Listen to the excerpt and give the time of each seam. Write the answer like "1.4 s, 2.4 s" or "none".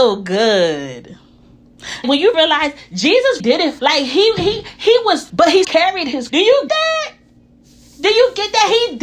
2.0 s, 2.3 s, 3.4 s, 3.8 s, 5.3 s, 5.6 s, 6.3 s, 6.7 s